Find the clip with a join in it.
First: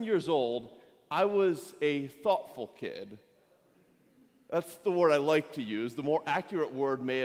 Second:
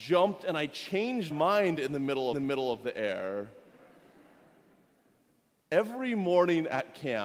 second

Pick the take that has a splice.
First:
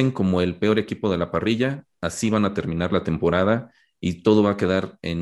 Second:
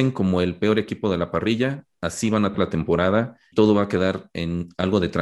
second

